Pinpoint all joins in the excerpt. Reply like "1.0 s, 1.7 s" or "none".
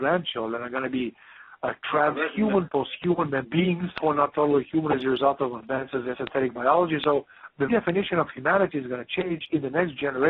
3.4 s, 6.1 s, 7.7 s